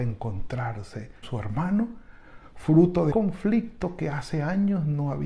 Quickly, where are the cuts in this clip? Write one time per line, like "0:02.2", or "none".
0:01.2
0:03.1